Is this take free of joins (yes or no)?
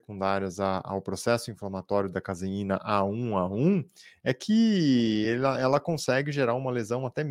yes